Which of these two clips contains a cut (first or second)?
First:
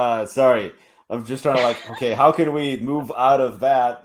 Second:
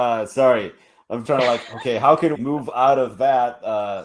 second